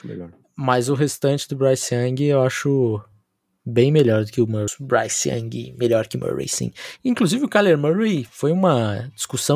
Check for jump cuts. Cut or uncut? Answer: uncut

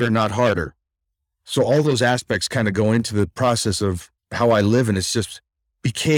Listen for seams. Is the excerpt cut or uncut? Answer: cut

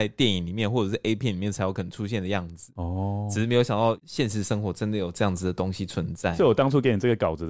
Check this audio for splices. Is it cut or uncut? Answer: uncut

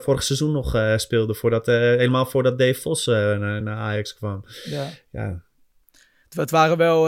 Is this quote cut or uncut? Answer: uncut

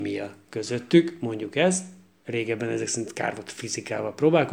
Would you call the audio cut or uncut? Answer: uncut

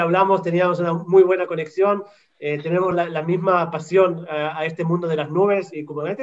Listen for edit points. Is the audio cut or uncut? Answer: uncut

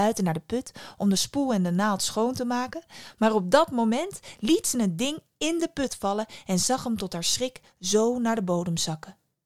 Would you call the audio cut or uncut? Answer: uncut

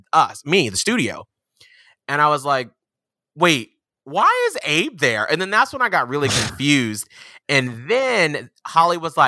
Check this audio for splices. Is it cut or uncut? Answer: uncut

